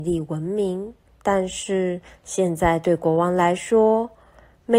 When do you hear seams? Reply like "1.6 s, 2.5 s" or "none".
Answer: 1.1 s